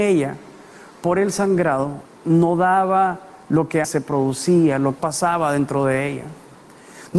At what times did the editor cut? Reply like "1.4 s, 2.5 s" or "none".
2.1 s, 3.4 s, 3.8 s, 5.0 s